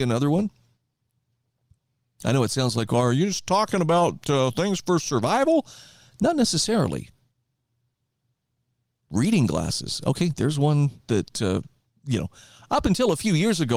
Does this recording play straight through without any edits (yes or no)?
yes